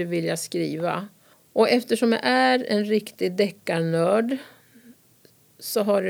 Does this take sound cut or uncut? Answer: cut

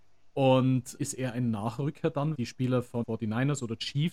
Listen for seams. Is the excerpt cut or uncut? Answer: cut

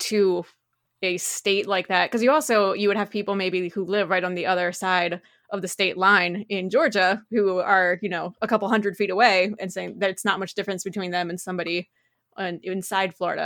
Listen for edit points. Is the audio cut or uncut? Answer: uncut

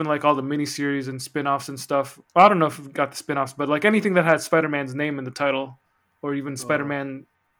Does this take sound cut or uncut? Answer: cut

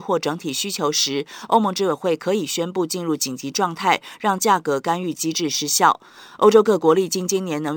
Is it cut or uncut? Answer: uncut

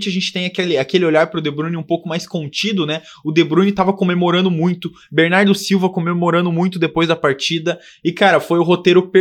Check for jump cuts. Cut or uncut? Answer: uncut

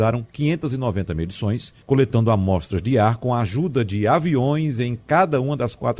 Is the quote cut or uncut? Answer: cut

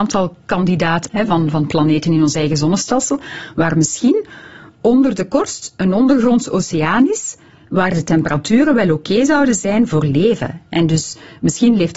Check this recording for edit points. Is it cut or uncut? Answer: cut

